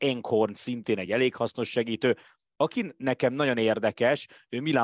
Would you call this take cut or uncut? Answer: uncut